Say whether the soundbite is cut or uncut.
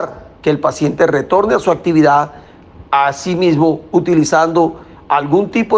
uncut